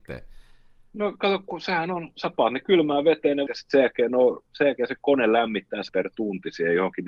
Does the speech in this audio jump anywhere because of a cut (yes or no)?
yes